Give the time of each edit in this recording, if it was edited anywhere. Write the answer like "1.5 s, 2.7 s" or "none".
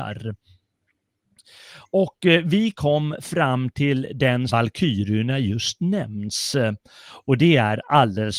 4.5 s